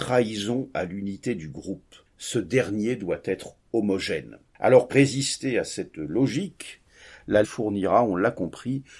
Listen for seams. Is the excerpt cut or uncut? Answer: cut